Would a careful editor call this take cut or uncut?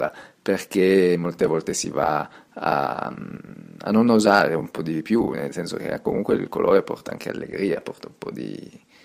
uncut